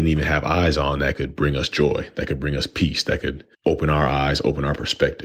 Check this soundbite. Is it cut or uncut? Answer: cut